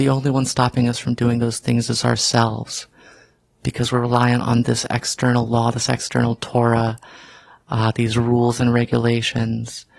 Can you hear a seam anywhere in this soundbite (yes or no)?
no